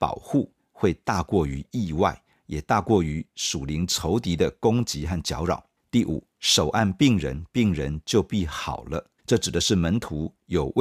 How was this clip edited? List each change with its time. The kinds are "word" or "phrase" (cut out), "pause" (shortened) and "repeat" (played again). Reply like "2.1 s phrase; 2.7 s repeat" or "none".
5.8 s pause; 9.2 s pause